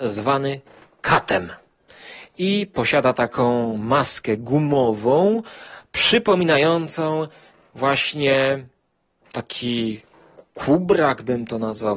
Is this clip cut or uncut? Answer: uncut